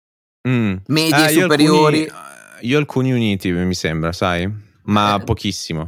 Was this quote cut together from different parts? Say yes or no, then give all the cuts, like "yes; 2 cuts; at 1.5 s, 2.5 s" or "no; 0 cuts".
no; 0 cuts